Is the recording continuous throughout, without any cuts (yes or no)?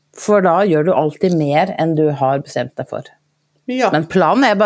yes